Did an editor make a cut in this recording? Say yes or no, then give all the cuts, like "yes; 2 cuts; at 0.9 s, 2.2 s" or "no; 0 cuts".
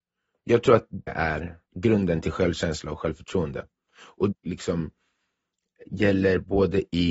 yes; 3 cuts; at 1.1 s, 1.6 s, 4.3 s